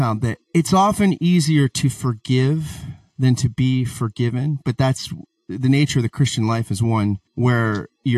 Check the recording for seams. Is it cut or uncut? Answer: uncut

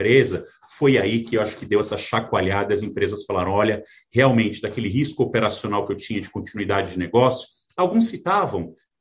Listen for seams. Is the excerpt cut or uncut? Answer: uncut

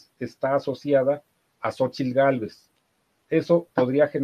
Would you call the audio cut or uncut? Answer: uncut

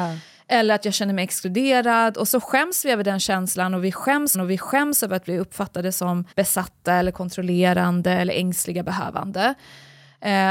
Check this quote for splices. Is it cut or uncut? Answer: cut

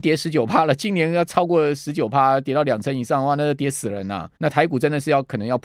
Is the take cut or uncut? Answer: cut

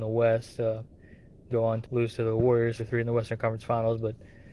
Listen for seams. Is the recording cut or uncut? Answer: cut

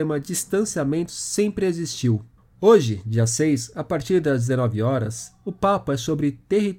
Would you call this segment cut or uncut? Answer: cut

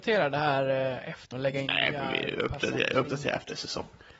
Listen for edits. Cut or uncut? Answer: cut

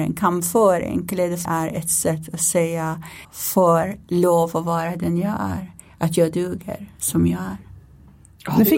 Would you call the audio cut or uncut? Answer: cut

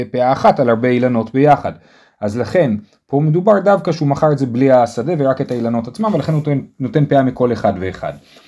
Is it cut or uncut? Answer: uncut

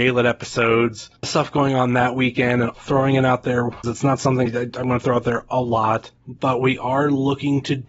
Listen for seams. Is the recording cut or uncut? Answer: cut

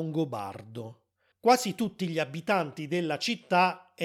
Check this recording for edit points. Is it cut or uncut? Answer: cut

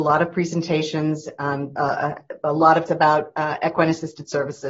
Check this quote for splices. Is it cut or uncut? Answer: cut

